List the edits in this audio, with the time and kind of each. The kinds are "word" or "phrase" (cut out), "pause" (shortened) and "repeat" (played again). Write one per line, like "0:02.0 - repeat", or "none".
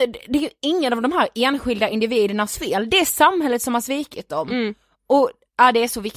none